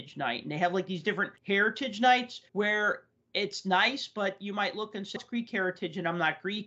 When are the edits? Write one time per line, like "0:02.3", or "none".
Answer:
0:01.4
0:02.5
0:05.2